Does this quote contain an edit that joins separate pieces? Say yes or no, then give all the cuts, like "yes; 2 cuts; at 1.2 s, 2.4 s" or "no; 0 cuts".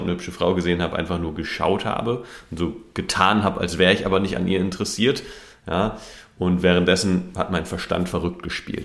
no; 0 cuts